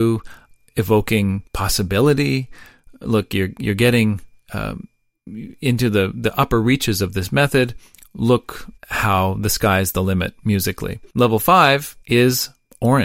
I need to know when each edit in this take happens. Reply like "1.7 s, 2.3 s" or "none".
1.5 s, 8.8 s, 11.1 s, 12.0 s